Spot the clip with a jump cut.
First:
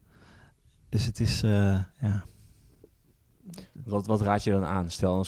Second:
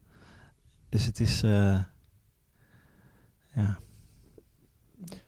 first; 1 cut; at 1.9 s

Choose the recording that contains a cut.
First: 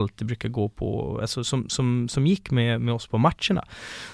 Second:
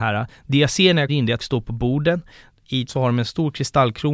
second; 3 cuts; at 1.1 s, 1.4 s, 2.9 s

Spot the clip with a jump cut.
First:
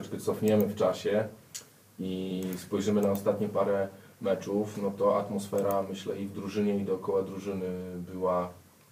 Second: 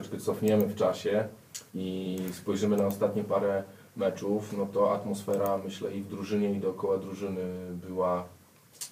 second; 1 cut; at 1.7 s

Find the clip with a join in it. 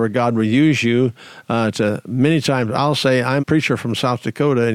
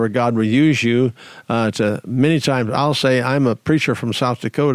first; 1 cut; at 3.4 s

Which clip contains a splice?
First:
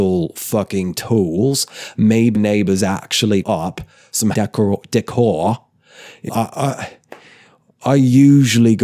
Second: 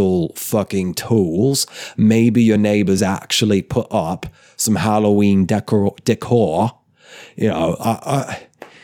first; 4 cuts; at 2.3 s, 3.4 s, 4.3 s, 6.3 s

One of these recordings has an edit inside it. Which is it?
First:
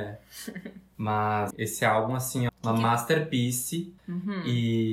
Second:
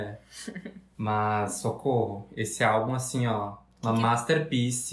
first; 3 cuts; at 1.5 s, 2.5 s, 4.0 s

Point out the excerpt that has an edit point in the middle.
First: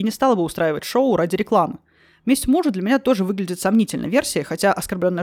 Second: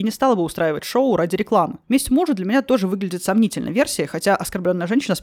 second; 1 cut; at 1.8 s

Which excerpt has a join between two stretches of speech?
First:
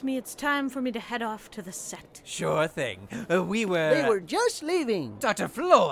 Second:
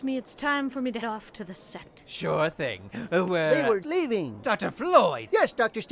second; 3 cuts; at 1.0 s, 3.3 s, 3.8 s

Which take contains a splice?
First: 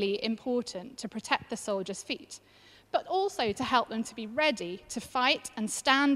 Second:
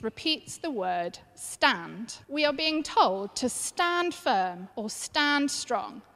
second; 2 cuts; at 2.2 s, 4.7 s

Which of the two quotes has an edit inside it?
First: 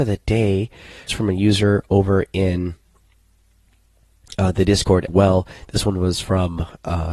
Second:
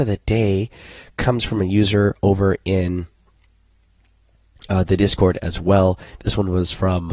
first; 2 cuts; at 1.1 s, 5.1 s

